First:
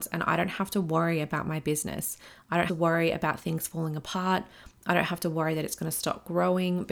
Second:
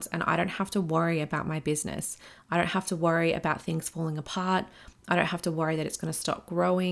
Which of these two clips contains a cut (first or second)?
first